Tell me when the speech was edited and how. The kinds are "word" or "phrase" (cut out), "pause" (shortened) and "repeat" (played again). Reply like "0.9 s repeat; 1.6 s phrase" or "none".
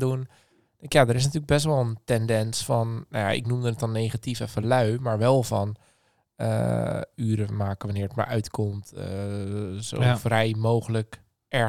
none